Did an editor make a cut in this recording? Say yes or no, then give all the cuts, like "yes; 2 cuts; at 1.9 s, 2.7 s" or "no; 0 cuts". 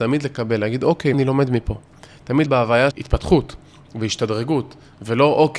yes; 3 cuts; at 1.1 s, 2.5 s, 2.9 s